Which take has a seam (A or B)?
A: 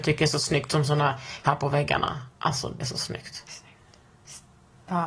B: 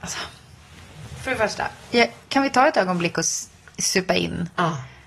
A